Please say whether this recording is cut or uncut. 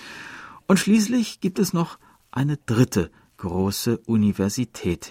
uncut